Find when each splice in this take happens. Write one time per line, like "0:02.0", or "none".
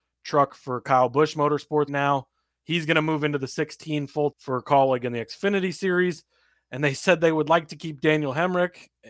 0:01.9
0:04.3